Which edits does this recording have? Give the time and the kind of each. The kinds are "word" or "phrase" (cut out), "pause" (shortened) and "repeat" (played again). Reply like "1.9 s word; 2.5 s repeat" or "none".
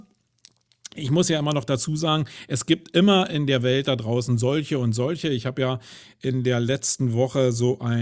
none